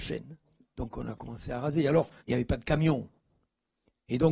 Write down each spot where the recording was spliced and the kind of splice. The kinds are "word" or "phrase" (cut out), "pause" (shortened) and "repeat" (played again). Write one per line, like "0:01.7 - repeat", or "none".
none